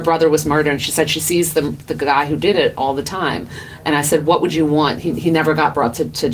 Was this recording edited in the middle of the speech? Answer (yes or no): no